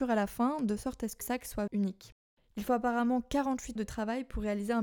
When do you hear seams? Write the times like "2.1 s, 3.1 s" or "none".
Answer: 1.2 s, 1.7 s, 3.8 s